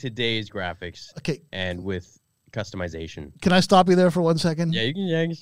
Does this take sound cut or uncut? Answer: uncut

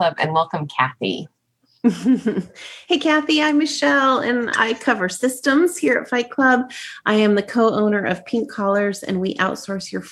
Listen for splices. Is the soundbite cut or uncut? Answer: uncut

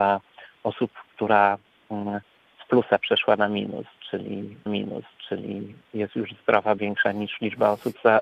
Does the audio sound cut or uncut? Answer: cut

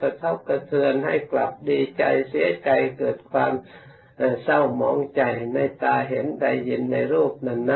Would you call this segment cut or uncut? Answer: uncut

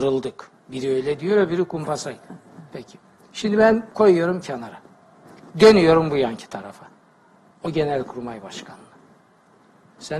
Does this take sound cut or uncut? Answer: cut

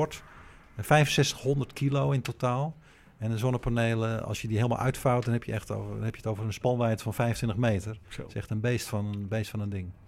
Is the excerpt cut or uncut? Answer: uncut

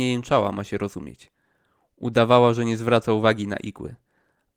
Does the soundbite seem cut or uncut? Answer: uncut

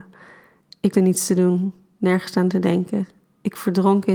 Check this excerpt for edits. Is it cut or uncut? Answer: cut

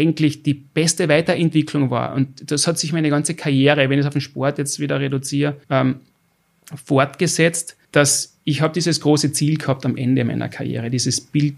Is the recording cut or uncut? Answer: cut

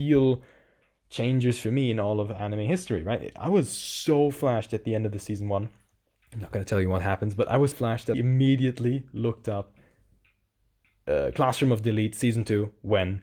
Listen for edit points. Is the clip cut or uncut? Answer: cut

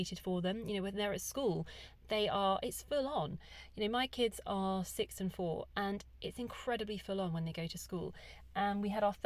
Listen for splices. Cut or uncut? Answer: uncut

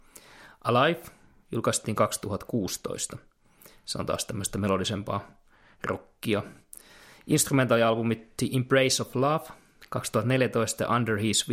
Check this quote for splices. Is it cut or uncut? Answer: uncut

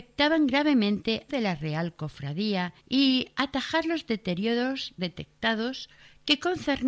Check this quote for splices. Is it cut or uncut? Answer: cut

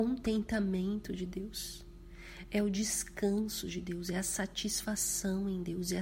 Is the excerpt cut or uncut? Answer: uncut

